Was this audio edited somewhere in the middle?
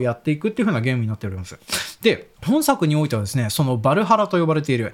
yes; 1 cut; at 2.3 s

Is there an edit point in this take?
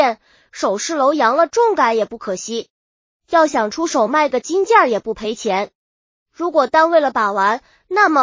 no; 0 cuts

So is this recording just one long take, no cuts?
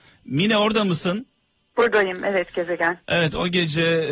yes; 0 cuts

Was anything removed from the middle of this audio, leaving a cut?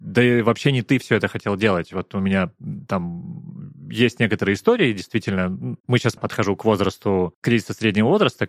yes; 2 cuts; at 5.8 s, 6.2 s

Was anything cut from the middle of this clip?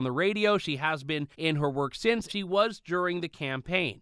yes; 2 cuts; at 1.3 s, 2.3 s

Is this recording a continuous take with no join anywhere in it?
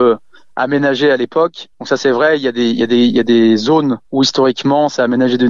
no; 2 cuts; at 1.7 s, 4.1 s

